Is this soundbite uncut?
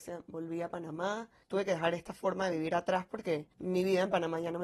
yes; 0 cuts

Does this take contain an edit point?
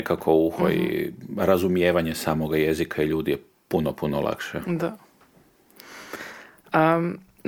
no; 0 cuts

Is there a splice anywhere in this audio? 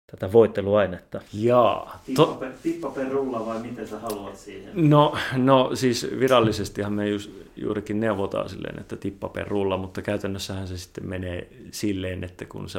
yes; 1 cut; at 1.3 s

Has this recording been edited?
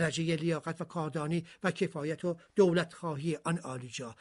no; 0 cuts

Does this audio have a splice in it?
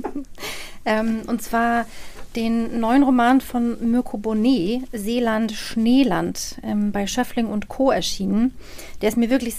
no; 0 cuts

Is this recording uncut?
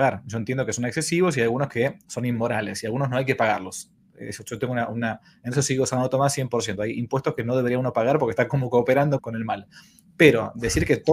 no; 1 cut; at 9.2 s

